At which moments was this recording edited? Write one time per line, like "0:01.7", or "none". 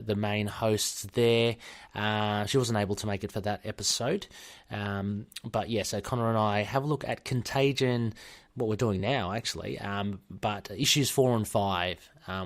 none